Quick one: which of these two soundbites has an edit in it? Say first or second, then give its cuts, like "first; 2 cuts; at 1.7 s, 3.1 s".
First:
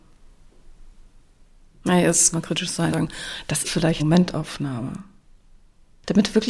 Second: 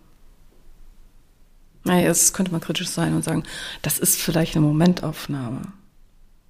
first; 4 cuts; at 2.3 s, 2.9 s, 3.6 s, 4.0 s